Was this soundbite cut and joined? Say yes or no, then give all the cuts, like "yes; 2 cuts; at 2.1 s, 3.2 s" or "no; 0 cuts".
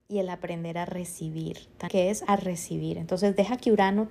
yes; 2 cuts; at 1.9 s, 2.3 s